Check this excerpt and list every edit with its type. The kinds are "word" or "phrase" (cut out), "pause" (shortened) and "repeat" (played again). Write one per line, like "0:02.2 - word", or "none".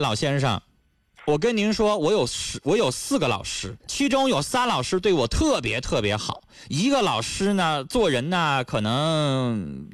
0:03.8 - pause